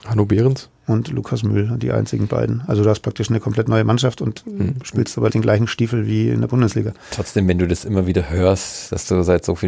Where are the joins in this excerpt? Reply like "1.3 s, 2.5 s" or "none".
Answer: 5.3 s